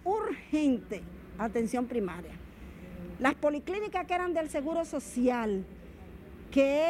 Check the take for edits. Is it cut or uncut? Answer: uncut